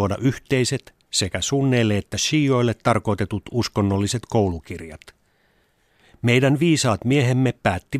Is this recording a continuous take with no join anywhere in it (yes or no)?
yes